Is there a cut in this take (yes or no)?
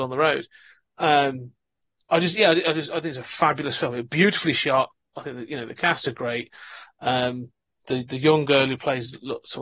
no